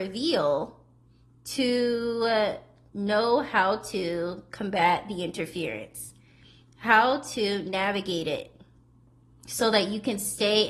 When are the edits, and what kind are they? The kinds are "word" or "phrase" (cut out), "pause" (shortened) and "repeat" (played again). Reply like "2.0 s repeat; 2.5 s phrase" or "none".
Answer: none